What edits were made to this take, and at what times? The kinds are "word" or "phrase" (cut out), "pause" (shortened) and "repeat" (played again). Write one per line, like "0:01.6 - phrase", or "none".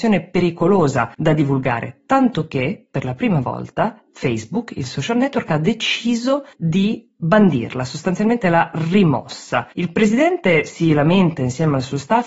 0:01.1 - pause
0:06.5 - pause
0:09.7 - pause

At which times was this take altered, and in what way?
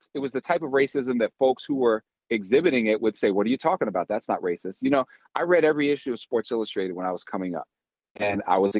none

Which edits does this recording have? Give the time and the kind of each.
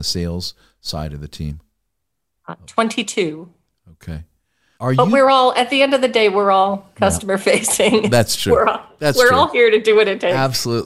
0:04.7 - word

